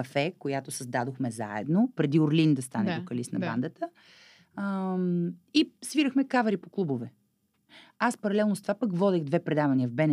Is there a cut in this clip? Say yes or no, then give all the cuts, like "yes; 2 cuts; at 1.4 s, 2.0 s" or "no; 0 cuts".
no; 0 cuts